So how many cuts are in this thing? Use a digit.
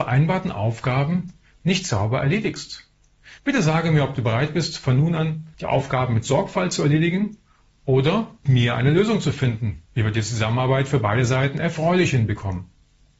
4